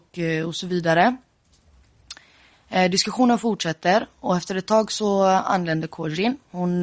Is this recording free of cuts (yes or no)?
yes